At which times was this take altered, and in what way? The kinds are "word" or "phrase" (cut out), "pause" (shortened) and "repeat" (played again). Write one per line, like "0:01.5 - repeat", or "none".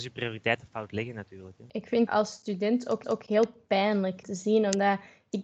0:02.1 - word
0:03.0 - repeat
0:04.2 - word